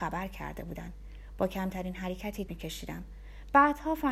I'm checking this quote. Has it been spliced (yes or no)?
yes